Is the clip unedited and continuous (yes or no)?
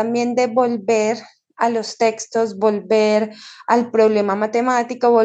yes